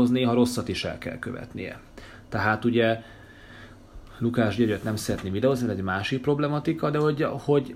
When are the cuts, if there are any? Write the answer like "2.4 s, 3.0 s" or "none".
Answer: none